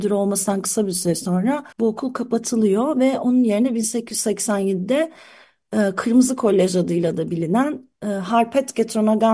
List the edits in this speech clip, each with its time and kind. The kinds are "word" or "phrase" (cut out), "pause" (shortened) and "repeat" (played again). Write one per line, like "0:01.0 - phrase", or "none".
0:01.7 - pause